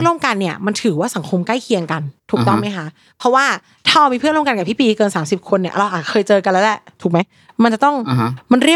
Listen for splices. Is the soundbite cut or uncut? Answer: cut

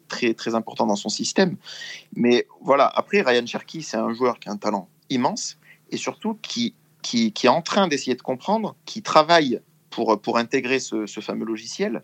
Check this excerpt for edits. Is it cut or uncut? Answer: uncut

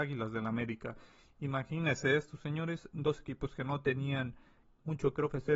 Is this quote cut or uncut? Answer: uncut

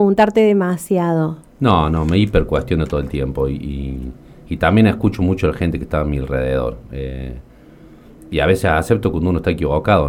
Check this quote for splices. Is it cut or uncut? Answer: uncut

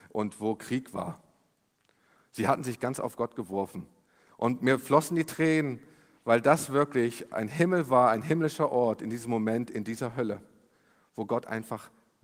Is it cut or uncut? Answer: uncut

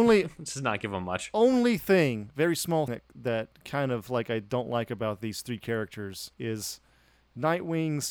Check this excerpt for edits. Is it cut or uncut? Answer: cut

